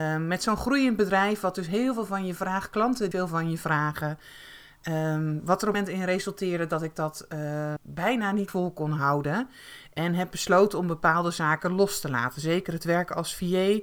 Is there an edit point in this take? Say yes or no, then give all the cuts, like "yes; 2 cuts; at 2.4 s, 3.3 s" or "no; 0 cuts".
yes; 4 cuts; at 3.1 s, 5.7 s, 7.8 s, 8.5 s